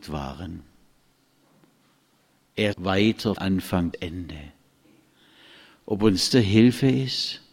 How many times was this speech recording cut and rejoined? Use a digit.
4